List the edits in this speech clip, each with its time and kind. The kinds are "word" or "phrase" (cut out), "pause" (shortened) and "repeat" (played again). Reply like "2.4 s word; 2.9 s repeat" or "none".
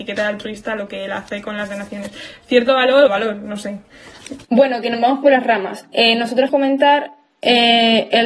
3.1 s phrase; 4.4 s pause; 6.5 s word